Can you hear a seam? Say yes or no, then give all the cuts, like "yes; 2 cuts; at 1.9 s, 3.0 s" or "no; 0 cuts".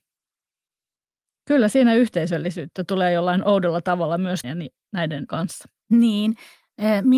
yes; 2 cuts; at 4.4 s, 5.3 s